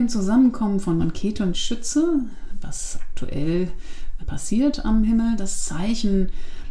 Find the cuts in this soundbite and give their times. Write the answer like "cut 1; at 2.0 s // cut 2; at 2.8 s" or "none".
cut 1; at 1.0 s // cut 2; at 1.5 s // cut 3; at 4.2 s

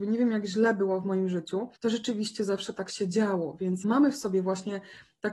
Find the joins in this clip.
cut 1; at 1.8 s // cut 2; at 3.8 s

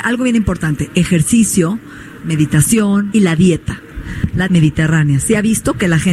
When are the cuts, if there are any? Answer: cut 1; at 2.2 s // cut 2; at 3.1 s // cut 3; at 4.5 s

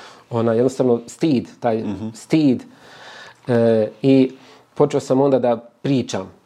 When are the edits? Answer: none

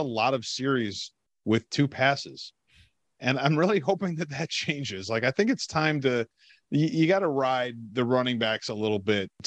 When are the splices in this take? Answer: none

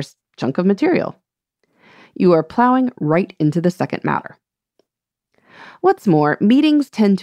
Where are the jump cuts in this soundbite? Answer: none

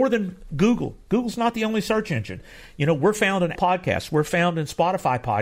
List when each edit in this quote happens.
cut 1; at 3.5 s

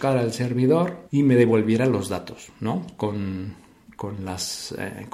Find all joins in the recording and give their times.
cut 1; at 1.1 s

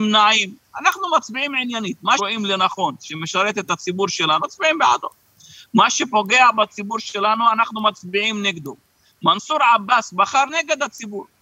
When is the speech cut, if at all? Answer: cut 1; at 2.2 s // cut 2; at 4.4 s // cut 3; at 10.5 s

